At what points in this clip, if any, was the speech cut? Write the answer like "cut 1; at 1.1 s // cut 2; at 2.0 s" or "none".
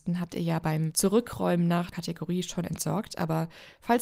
cut 1; at 1.9 s